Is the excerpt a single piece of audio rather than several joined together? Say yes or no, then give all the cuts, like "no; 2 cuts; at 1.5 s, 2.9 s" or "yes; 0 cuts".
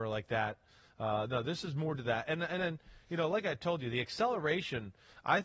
yes; 0 cuts